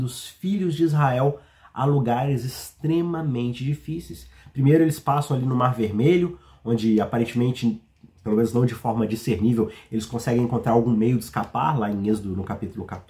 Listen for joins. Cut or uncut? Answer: uncut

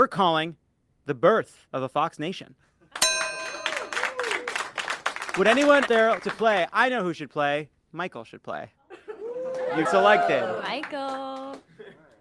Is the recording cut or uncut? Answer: cut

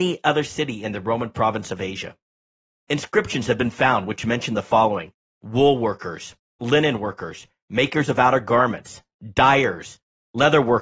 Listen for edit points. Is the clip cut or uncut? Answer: uncut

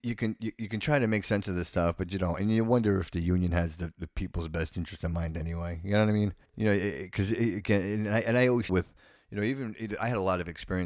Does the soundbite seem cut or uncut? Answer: cut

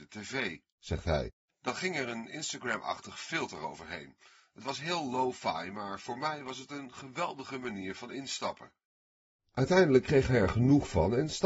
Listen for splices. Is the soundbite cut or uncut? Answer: uncut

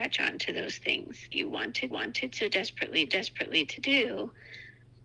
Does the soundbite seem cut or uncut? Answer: cut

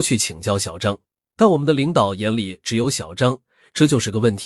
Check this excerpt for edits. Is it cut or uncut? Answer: uncut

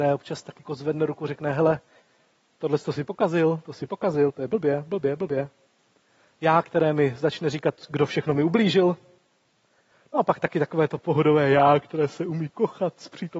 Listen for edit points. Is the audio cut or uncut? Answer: uncut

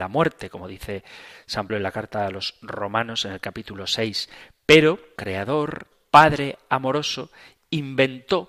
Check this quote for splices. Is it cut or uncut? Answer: cut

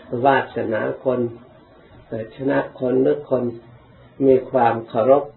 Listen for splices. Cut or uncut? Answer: uncut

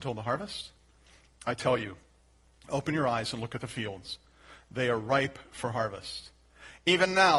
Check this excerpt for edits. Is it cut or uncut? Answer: uncut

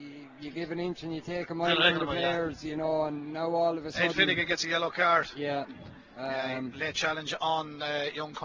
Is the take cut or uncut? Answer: uncut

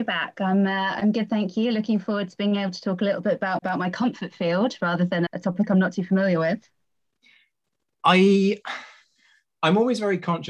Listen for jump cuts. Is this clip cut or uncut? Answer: cut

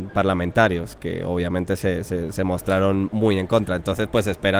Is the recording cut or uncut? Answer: uncut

